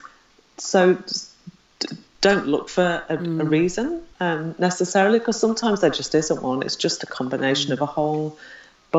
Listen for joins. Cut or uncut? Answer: cut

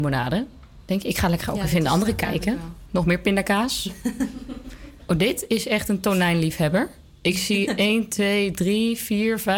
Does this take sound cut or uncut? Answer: uncut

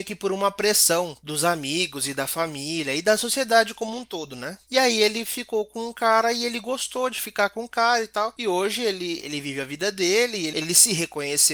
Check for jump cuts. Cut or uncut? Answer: uncut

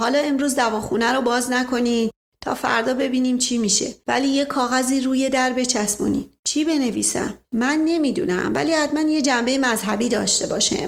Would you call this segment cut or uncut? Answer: uncut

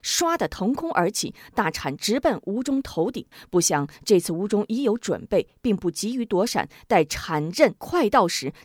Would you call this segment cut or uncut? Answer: uncut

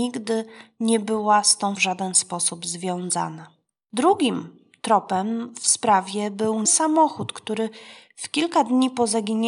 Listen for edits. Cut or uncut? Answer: cut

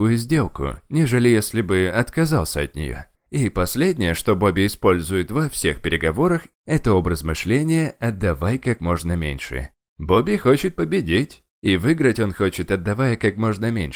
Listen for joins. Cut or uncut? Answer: cut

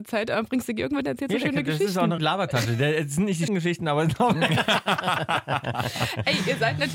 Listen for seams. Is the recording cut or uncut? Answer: cut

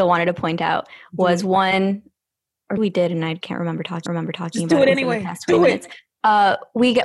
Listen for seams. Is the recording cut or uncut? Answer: cut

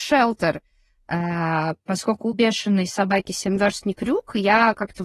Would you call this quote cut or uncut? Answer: uncut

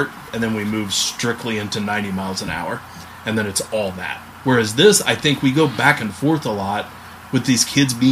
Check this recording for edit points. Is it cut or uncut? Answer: uncut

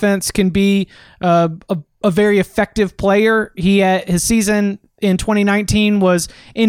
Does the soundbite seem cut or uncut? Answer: uncut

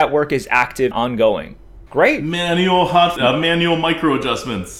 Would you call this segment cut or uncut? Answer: cut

